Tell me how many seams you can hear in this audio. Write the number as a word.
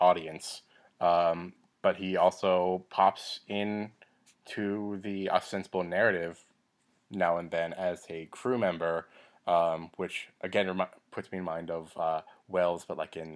zero